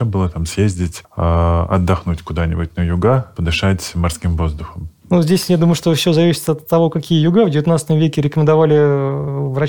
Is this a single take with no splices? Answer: yes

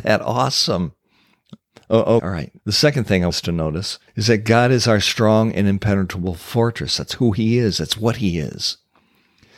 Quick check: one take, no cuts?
no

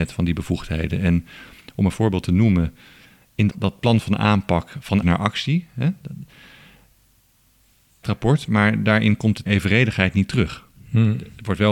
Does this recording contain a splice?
yes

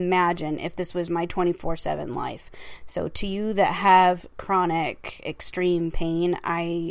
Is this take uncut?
yes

